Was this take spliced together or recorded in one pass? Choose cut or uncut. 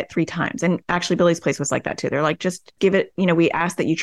uncut